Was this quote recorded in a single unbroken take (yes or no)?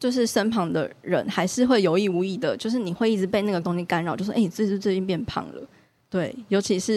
no